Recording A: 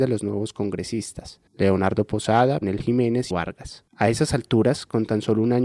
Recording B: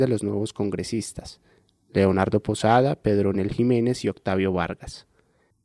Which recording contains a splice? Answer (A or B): A